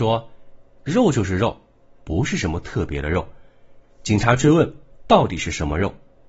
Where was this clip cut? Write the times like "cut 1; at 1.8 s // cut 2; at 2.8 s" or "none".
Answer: none

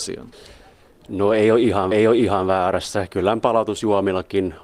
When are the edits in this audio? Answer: cut 1; at 1.9 s

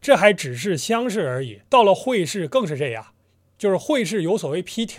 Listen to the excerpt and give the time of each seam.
cut 1; at 1.7 s // cut 2; at 3.2 s

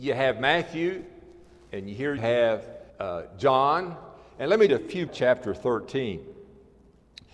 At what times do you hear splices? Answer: cut 1; at 2.2 s // cut 2; at 2.9 s // cut 3; at 4.7 s // cut 4; at 5.1 s

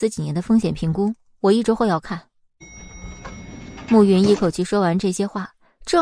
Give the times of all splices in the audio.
none

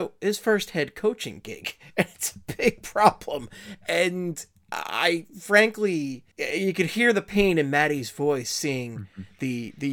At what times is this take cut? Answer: cut 1; at 6.3 s

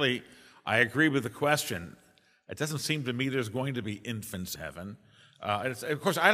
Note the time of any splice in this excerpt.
cut 1; at 4.6 s

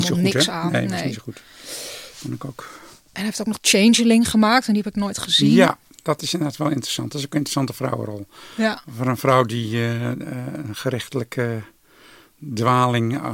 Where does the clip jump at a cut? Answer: none

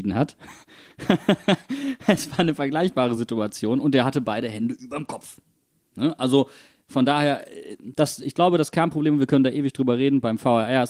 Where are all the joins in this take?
none

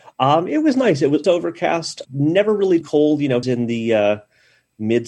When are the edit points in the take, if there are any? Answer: cut 1; at 1.2 s // cut 2; at 2.0 s // cut 3; at 2.8 s // cut 4; at 3.4 s

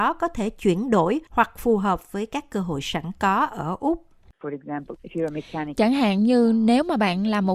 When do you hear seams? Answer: cut 1; at 1.3 s

